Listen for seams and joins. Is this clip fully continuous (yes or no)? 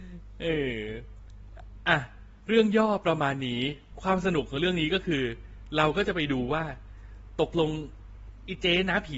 no